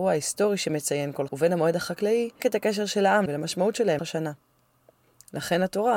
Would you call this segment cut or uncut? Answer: cut